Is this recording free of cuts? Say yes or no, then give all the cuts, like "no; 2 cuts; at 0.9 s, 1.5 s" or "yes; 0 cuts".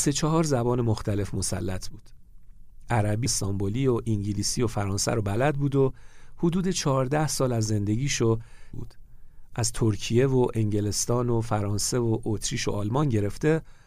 no; 2 cuts; at 3.3 s, 8.7 s